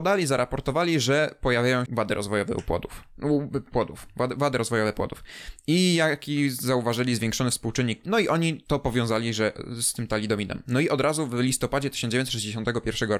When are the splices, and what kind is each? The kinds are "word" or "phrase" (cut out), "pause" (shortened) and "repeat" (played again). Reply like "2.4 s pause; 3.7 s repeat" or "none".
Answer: 1.9 s word; 8.0 s word